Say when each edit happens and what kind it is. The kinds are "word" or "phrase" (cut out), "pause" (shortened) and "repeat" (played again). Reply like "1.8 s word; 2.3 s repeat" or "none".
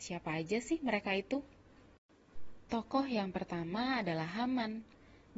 none